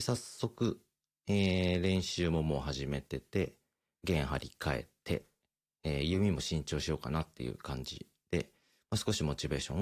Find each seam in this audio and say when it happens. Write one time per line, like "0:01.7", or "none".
none